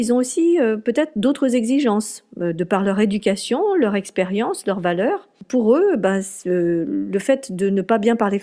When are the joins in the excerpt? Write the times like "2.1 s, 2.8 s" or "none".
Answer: none